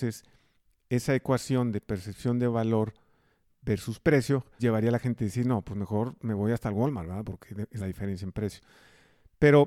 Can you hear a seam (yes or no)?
yes